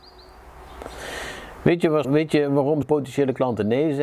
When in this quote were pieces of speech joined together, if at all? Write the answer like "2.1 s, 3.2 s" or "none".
2.0 s, 2.8 s